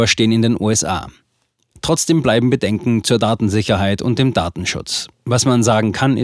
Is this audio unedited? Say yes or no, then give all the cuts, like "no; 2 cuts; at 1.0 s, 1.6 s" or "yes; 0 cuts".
yes; 0 cuts